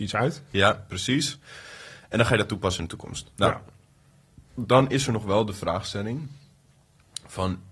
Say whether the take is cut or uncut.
cut